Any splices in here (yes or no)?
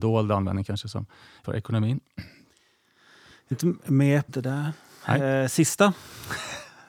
yes